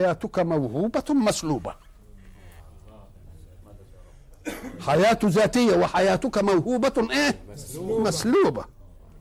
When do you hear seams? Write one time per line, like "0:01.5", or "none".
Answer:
none